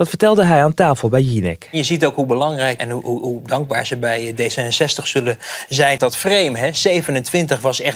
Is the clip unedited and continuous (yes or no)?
no